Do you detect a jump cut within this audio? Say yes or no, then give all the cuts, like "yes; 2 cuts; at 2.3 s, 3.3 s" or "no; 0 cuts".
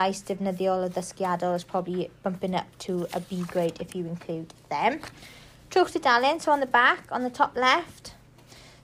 no; 0 cuts